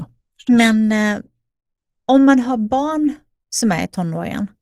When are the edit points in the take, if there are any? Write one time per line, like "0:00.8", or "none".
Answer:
none